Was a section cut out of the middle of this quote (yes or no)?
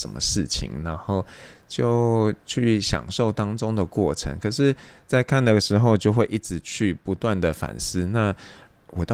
no